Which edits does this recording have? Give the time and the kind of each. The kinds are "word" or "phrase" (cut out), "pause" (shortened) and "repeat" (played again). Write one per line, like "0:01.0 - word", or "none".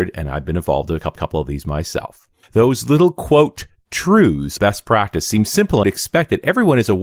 0:01.2 - repeat
0:02.4 - pause
0:04.6 - word
0:05.8 - phrase